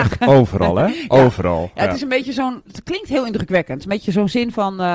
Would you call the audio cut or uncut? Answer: uncut